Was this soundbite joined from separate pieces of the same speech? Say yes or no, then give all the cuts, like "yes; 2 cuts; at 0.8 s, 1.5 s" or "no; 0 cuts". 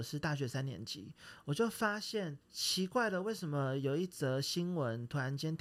yes; 1 cut; at 2.4 s